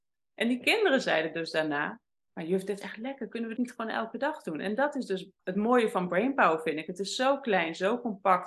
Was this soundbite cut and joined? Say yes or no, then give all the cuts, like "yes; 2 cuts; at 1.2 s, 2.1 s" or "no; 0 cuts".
yes; 3 cuts; at 2.8 s, 3.6 s, 5.4 s